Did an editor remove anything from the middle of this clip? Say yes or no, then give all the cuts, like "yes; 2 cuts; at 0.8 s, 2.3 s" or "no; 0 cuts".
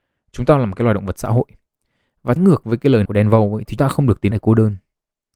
yes; 4 cuts; at 2.4 s, 3.0 s, 3.8 s, 4.3 s